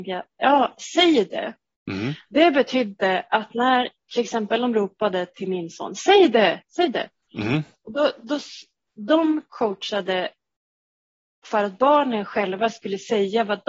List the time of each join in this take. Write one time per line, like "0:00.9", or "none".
none